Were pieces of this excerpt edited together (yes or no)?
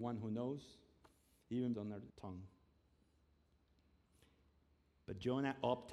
yes